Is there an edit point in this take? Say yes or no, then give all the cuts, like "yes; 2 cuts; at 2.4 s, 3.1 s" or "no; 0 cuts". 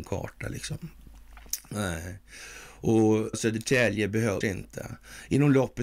yes; 2 cuts; at 3.3 s, 4.4 s